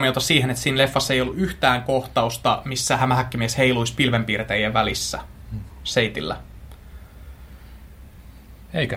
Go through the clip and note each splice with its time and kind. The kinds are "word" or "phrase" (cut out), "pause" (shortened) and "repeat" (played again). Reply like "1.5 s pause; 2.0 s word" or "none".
none